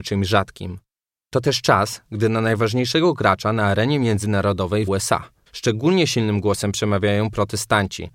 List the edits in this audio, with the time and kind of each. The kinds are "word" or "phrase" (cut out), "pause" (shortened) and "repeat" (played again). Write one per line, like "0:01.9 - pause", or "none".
0:04.9 - word
0:05.5 - pause